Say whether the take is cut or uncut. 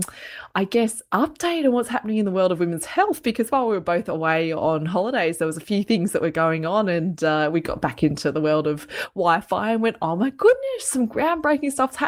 uncut